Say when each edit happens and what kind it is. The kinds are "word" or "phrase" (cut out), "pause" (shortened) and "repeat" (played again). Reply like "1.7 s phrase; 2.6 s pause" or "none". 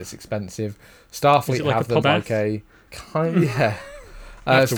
2.0 s word; 2.9 s word